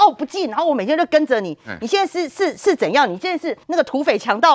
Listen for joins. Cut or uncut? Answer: cut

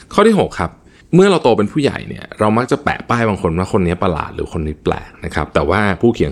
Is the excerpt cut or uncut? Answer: uncut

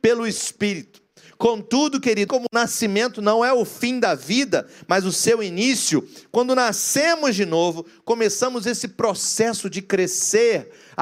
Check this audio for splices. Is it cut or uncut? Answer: cut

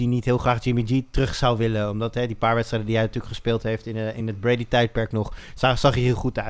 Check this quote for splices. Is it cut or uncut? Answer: uncut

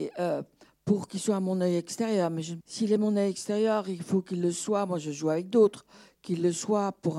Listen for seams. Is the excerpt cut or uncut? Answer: cut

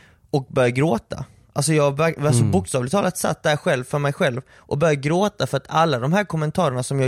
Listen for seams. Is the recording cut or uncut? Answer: uncut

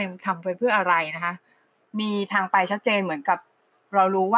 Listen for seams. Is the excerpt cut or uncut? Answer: uncut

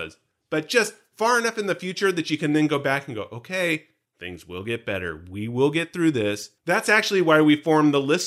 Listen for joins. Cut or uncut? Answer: cut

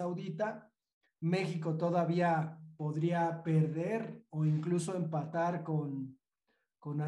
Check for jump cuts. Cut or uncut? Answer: uncut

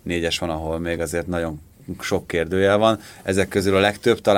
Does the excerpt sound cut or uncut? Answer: uncut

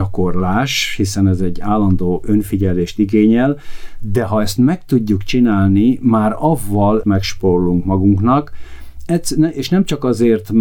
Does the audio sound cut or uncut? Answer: cut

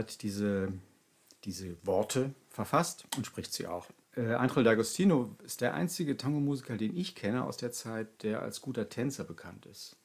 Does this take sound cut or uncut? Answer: cut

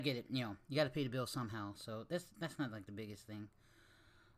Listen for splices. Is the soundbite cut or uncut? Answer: uncut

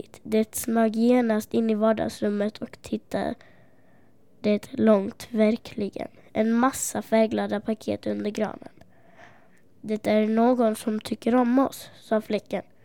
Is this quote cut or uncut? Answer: uncut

